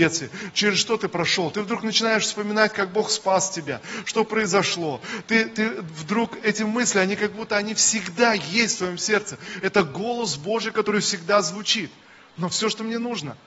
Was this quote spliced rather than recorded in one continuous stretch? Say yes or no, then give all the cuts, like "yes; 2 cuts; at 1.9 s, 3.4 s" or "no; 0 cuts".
no; 0 cuts